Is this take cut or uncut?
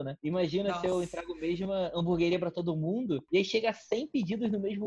uncut